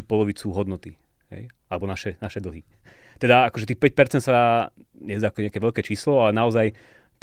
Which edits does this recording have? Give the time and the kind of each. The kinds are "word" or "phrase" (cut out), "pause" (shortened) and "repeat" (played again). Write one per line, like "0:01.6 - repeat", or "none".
none